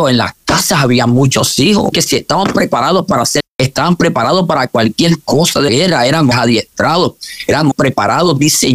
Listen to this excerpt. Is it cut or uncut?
cut